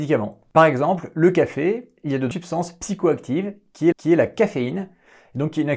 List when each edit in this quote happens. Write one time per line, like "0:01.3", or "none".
0:02.3
0:03.9